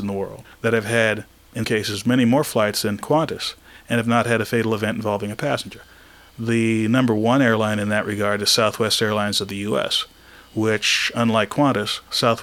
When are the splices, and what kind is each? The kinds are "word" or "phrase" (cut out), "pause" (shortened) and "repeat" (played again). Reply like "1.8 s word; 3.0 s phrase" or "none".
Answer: 1.6 s word; 3.0 s word